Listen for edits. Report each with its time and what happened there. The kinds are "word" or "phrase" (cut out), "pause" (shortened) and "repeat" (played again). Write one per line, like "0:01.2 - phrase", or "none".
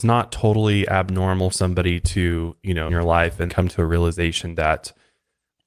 0:01.5 - word
0:02.9 - phrase
0:03.5 - word